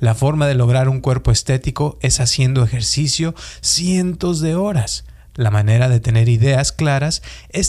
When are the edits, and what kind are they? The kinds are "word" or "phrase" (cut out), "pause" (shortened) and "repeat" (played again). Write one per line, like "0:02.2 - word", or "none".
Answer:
none